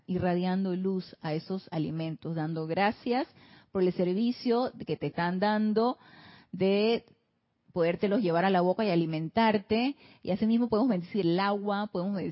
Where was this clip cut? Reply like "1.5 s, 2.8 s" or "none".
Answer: none